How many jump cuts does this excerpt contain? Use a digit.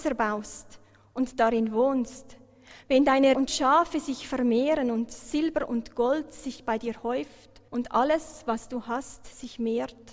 2